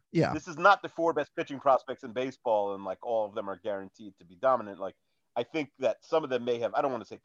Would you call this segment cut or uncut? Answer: uncut